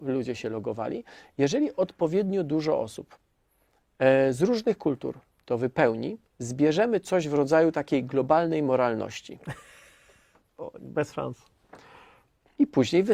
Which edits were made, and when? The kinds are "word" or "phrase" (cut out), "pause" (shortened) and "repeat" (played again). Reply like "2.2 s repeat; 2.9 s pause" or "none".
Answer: none

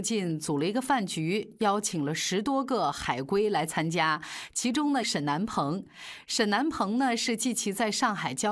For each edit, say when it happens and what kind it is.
5.0 s phrase

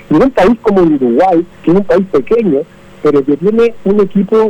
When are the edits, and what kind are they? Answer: 1.5 s pause

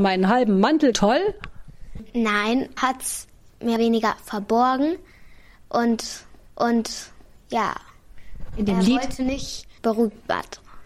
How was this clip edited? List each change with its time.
0.9 s phrase; 2.8 s word; 3.8 s word; 6.5 s repeat; 9.8 s word

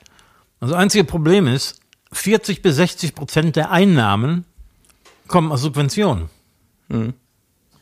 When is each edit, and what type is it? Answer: none

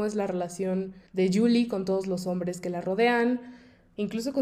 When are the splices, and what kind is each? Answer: 1.1 s pause

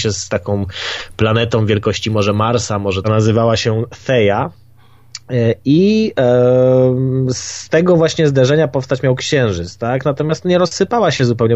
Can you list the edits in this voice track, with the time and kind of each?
3.0 s phrase

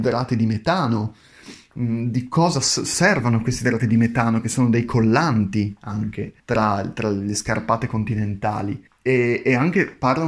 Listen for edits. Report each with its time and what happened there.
6.4 s pause; 8.9 s pause

